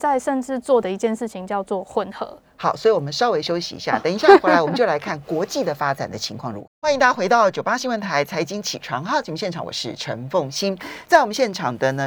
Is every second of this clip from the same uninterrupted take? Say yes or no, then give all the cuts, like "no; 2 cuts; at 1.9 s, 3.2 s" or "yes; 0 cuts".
no; 1 cut; at 6.8 s